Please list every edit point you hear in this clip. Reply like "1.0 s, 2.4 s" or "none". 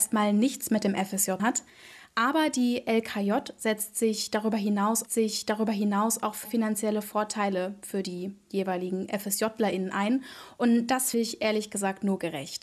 1.4 s, 5.1 s, 6.4 s, 11.1 s